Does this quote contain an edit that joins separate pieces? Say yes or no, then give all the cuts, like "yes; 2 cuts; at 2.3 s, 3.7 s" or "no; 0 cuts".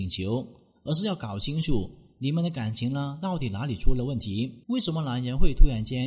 yes; 1 cut; at 4.6 s